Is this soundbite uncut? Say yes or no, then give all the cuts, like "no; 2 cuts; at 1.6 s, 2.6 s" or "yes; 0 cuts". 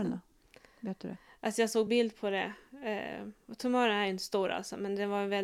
yes; 0 cuts